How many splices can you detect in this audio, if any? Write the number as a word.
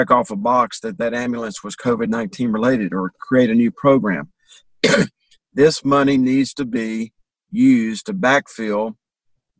zero